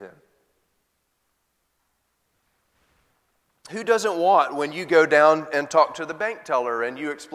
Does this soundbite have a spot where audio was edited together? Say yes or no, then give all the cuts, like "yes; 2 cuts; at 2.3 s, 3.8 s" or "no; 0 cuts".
no; 0 cuts